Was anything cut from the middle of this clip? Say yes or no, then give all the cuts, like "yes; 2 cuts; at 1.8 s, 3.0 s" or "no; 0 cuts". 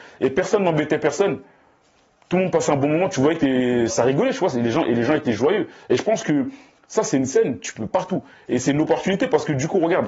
yes; 2 cuts; at 3.9 s, 7.9 s